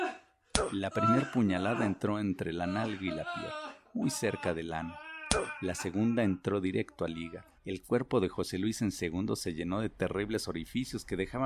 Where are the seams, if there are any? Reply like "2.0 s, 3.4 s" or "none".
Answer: 7.6 s